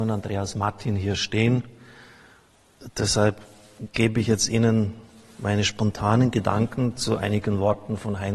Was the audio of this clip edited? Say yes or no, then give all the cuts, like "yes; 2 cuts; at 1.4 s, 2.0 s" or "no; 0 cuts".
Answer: no; 0 cuts